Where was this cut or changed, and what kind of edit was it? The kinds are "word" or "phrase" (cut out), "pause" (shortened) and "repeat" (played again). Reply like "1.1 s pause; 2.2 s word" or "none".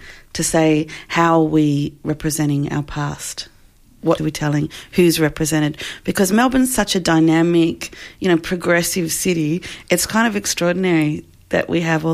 4.2 s word